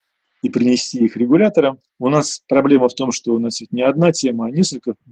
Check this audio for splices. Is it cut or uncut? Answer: cut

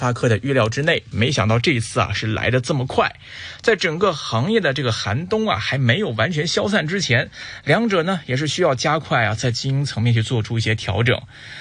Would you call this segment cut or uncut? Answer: cut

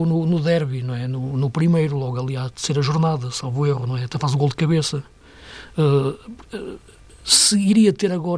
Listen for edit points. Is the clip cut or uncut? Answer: uncut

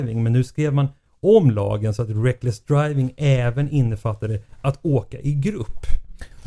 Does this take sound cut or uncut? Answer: uncut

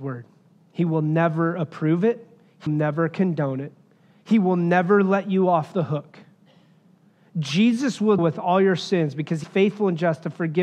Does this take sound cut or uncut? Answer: cut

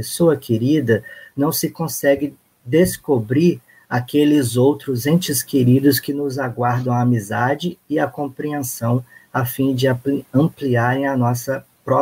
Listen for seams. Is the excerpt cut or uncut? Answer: uncut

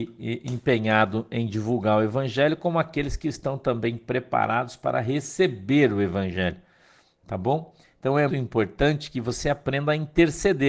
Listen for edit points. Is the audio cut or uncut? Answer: cut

